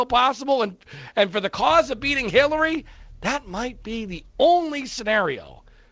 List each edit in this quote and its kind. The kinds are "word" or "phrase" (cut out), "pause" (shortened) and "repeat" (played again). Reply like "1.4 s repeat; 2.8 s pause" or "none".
none